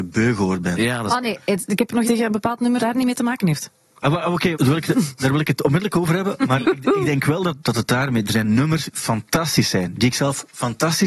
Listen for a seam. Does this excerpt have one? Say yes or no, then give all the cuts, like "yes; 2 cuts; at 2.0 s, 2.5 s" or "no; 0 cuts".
yes; 5 cuts; at 2.0 s, 2.8 s, 4.5 s, 6.6 s, 8.9 s